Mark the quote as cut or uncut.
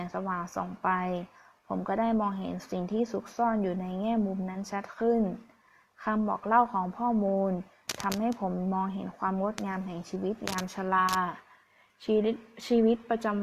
uncut